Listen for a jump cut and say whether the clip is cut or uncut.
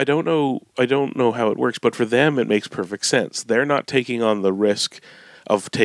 uncut